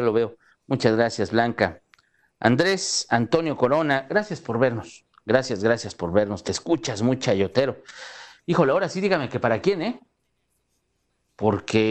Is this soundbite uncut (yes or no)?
yes